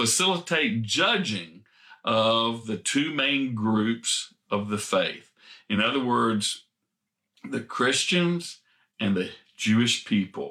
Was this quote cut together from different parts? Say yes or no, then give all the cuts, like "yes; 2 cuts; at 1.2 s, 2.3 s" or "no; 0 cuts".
no; 0 cuts